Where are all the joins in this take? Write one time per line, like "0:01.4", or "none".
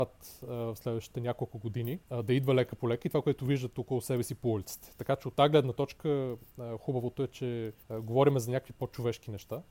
0:02.0
0:07.8